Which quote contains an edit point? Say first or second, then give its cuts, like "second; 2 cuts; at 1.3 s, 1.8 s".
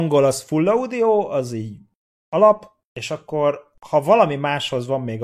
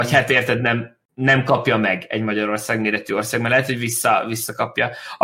second; 1 cut; at 1.0 s